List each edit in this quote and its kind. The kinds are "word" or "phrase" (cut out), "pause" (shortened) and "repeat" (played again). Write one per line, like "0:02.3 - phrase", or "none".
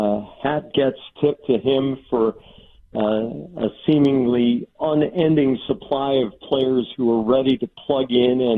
none

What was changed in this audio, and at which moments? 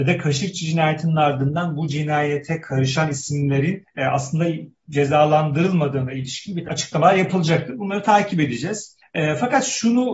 0:06.7 - word

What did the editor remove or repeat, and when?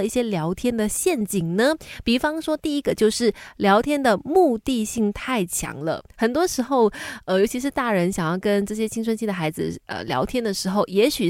0:06.1 - pause

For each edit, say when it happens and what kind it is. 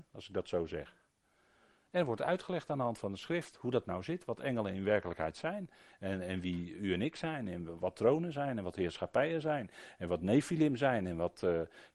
none

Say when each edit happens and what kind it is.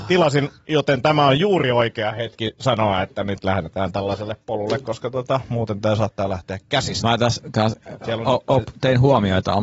none

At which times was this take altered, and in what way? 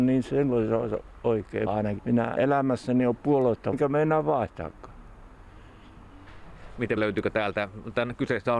0:01.7 - word
0:02.0 - word
0:02.4 - word
0:03.7 - word
0:07.0 - word

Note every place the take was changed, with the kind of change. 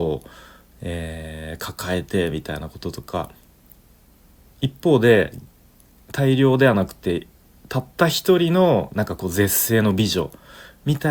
none

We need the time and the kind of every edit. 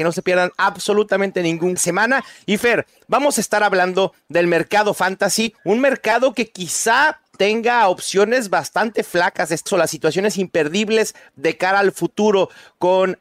0:01.8 - phrase
0:09.7 - phrase

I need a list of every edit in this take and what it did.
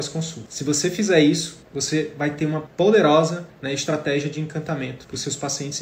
none

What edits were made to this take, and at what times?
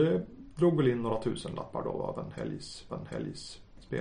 0:02.9 - repeat

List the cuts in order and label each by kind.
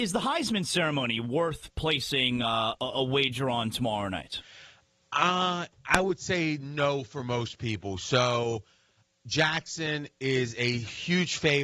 none

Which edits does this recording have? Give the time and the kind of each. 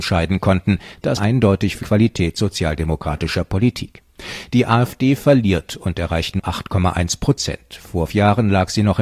0:01.2 - word
0:01.8 - word
0:06.4 - word
0:08.1 - word

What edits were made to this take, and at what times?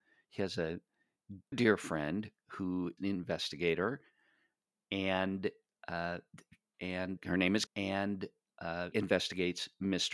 0:01.5 - word
0:03.0 - word
0:06.7 - word
0:07.2 - word
0:07.7 - word
0:08.9 - word

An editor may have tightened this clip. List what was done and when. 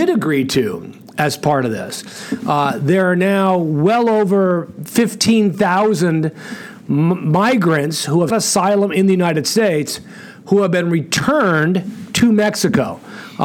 0:08.3 - word

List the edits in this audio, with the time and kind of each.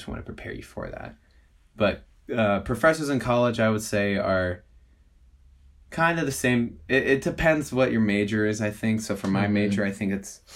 none

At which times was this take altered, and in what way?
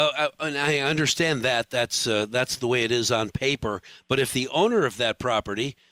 none

